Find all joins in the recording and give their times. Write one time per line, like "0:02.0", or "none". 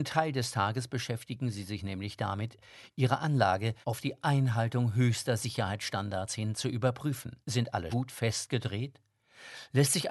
0:03.8
0:07.4
0:07.9

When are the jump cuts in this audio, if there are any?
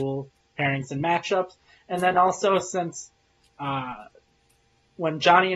none

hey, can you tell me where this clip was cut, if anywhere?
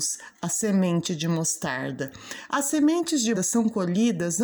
0:03.3

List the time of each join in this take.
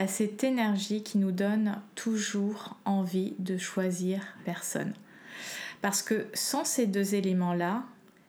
0:04.4

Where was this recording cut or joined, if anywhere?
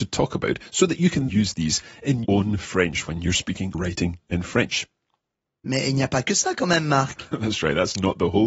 0:01.3
0:02.2
0:03.7

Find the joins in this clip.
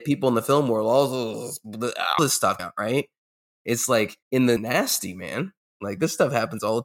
0:02.2
0:02.6
0:04.2
0:04.6

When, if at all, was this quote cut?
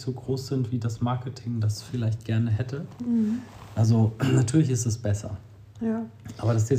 none

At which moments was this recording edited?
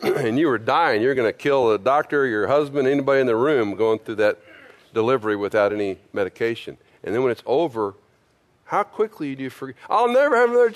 none

